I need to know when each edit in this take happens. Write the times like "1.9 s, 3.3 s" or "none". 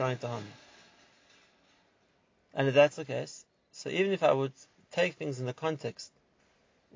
none